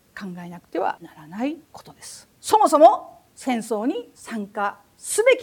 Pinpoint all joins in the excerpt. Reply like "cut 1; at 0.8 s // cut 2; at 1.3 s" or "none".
cut 1; at 1.6 s // cut 2; at 2.3 s